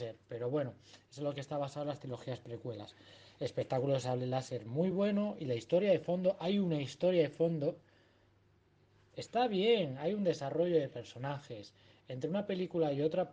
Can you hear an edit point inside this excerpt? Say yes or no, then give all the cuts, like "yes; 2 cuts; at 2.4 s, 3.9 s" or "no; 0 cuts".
no; 0 cuts